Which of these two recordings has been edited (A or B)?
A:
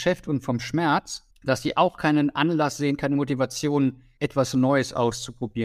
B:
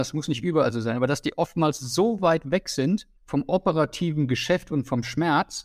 A